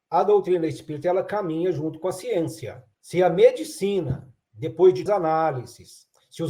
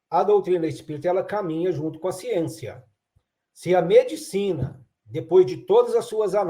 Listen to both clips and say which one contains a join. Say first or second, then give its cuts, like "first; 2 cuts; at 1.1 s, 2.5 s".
first; 2 cuts; at 2.9 s, 5.1 s